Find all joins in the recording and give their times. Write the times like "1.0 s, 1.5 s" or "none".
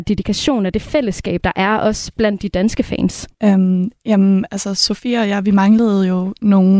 3.3 s